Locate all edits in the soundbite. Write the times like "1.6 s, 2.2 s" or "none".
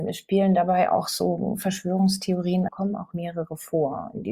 2.7 s